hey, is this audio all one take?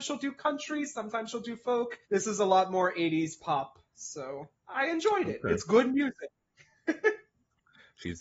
no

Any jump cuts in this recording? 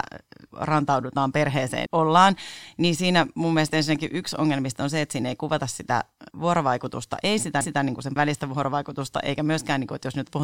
yes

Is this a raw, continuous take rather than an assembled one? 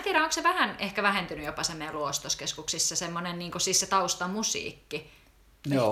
yes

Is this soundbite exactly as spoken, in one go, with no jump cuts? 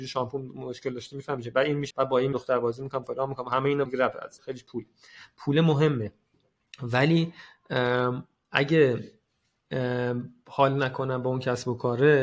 no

